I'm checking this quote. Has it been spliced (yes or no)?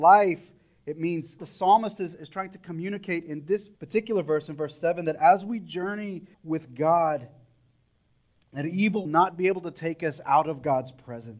yes